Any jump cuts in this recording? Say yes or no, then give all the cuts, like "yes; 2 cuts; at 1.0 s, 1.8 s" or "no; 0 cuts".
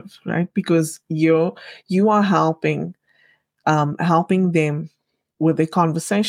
no; 0 cuts